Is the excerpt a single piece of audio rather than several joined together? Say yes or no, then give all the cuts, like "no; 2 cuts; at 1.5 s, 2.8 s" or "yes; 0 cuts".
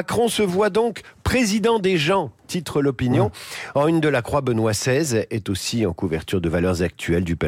yes; 0 cuts